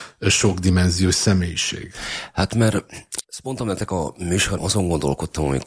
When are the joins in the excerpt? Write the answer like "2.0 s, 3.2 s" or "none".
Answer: 3.2 s, 4.6 s